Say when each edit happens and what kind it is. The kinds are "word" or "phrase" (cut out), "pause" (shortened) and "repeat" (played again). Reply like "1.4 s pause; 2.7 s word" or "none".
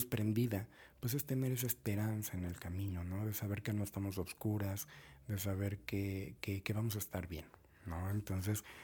none

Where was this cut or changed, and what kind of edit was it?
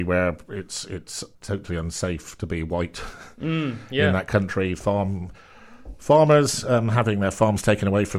1.3 s pause

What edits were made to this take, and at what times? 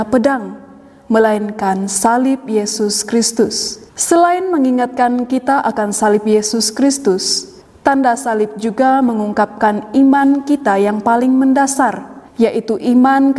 3.9 s pause; 7.6 s pause; 12.3 s pause

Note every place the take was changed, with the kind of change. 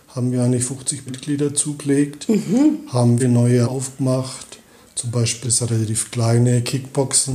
1.1 s word; 3.2 s word; 3.6 s word; 5.4 s word

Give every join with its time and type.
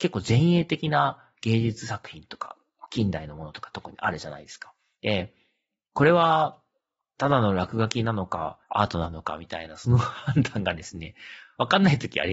8.6 s pause

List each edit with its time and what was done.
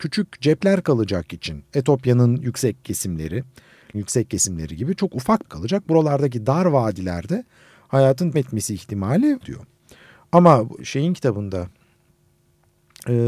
1.3 s word; 3.9 s word; 5.4 s word; 8.3 s word; 9.4 s word; 10.8 s word

